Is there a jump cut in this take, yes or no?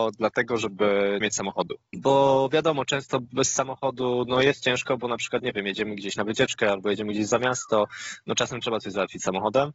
yes